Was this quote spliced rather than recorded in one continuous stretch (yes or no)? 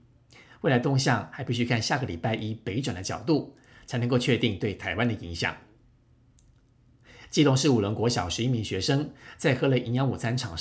no